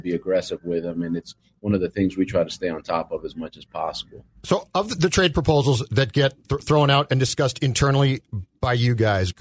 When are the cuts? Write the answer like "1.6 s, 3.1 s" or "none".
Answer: none